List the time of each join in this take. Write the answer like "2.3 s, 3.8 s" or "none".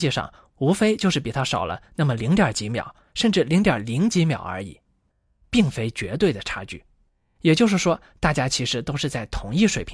none